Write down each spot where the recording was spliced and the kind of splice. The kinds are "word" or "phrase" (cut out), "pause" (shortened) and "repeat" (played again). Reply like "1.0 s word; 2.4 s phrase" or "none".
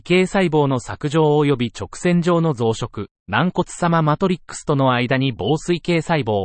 3.2 s pause